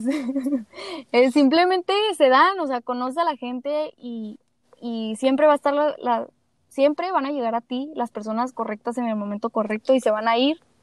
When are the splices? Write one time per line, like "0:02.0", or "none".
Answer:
none